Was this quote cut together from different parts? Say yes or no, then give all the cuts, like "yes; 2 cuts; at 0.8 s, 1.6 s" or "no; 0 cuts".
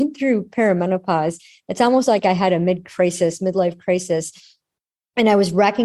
no; 0 cuts